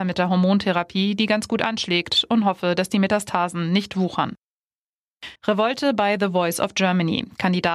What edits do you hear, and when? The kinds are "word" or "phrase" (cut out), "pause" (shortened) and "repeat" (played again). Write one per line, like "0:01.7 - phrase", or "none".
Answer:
0:05.3 - pause